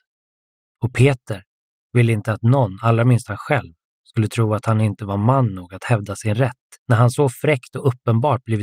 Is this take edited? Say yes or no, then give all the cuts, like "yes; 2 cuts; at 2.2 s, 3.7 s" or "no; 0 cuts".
yes; 1 cut; at 6.8 s